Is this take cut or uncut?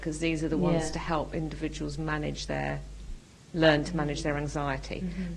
uncut